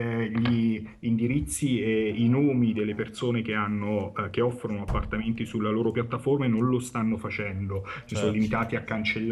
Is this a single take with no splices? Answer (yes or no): yes